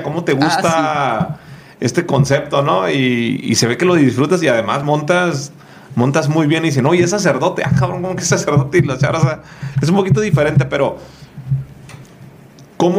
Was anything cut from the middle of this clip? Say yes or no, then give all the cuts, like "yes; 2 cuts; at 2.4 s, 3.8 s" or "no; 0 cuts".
no; 0 cuts